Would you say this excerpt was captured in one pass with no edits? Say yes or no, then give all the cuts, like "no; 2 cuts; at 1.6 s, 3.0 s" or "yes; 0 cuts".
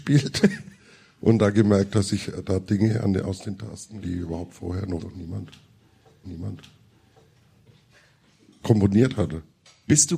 no; 3 cuts; at 4.0 s, 5.0 s, 6.2 s